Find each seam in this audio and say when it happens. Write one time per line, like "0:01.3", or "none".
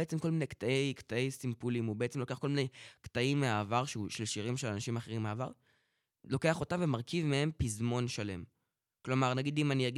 none